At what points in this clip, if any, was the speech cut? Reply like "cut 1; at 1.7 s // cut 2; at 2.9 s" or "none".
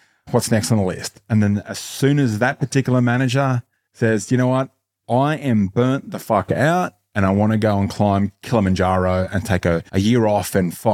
none